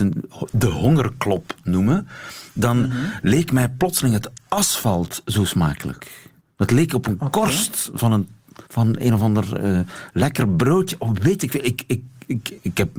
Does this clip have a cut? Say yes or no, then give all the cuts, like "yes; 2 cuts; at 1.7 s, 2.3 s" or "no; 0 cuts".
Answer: yes; 2 cuts; at 6.4 s, 8.7 s